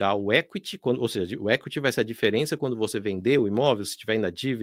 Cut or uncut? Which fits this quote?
uncut